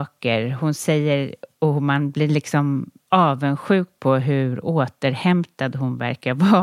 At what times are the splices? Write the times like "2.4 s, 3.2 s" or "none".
1.5 s, 3.0 s